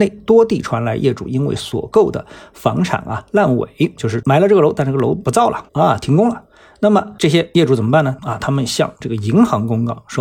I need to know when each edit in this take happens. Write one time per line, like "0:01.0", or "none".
0:05.7